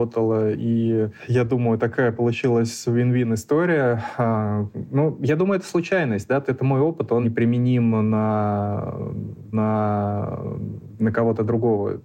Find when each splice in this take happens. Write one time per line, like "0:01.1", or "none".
0:06.5
0:07.2
0:09.5